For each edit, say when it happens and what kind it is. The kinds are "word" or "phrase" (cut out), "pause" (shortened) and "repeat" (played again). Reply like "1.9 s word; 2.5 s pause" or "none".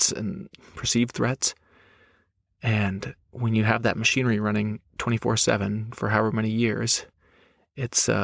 3.2 s pause; 4.9 s pause